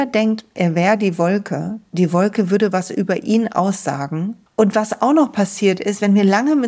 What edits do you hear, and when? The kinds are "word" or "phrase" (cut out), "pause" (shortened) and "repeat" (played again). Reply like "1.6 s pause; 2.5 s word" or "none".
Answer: 4.5 s pause